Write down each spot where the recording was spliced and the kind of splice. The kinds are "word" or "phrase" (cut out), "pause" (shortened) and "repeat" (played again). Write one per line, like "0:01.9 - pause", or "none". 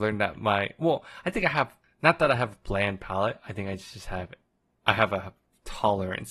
0:01.8 - pause
0:04.5 - pause